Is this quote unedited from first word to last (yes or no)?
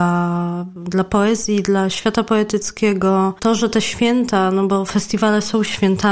yes